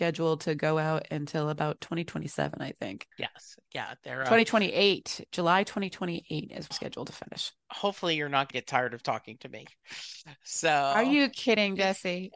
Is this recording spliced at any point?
yes; 3 cuts; at 3.1 s, 6.7 s, 8.5 s

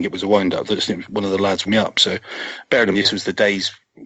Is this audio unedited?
no; 2 cuts; at 1.7 s, 2.9 s

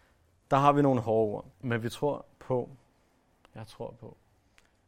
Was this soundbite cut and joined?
yes; 1 cut; at 1.5 s

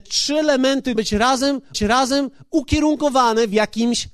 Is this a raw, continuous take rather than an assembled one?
no; 2 cuts; at 1.0 s, 1.7 s

